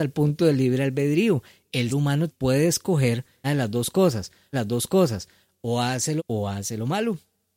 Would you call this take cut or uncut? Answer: cut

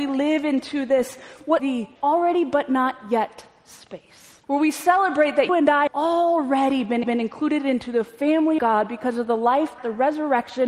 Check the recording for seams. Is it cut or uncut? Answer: cut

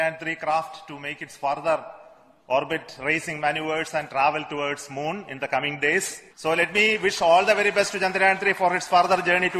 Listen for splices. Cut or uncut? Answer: cut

